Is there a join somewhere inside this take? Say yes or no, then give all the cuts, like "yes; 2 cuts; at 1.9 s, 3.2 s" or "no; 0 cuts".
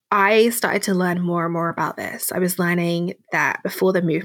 no; 0 cuts